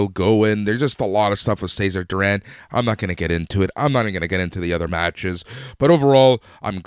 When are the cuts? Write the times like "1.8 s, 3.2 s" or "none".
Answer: none